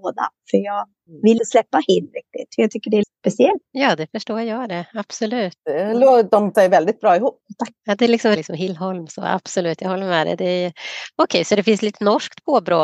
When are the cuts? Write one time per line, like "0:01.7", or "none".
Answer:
0:01.4
0:03.0
0:06.5
0:08.4